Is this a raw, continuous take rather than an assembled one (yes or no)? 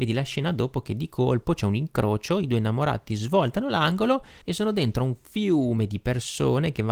no